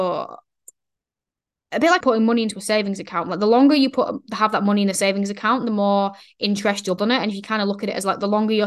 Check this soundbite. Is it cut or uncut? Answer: cut